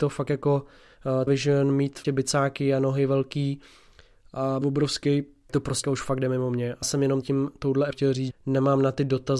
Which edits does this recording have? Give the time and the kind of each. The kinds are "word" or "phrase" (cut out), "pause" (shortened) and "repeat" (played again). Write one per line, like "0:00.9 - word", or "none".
0:01.3 - word
0:02.0 - word
0:04.6 - word
0:05.5 - word
0:05.8 - word
0:06.8 - word
0:07.2 - word
0:07.9 - word
0:08.3 - word